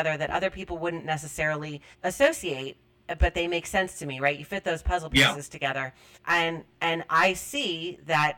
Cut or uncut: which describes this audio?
cut